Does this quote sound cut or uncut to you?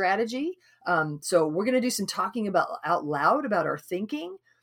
uncut